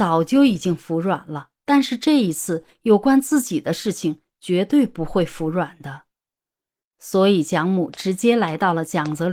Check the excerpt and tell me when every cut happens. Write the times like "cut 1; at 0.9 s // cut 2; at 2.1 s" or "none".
cut 1; at 1.6 s